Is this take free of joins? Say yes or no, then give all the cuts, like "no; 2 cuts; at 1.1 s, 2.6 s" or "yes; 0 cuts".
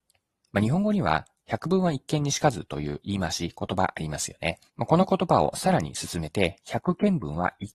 no; 1 cut; at 4.7 s